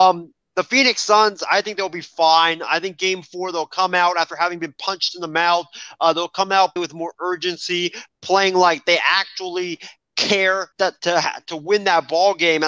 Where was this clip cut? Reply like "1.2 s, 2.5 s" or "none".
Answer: 6.8 s, 10.7 s